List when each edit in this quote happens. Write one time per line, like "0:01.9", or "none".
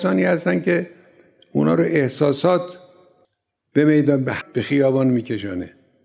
0:04.4